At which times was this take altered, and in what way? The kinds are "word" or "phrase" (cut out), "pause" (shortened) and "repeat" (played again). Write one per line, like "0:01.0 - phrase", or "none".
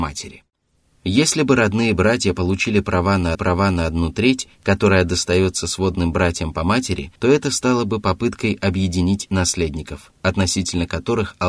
0:03.3 - repeat
0:07.2 - pause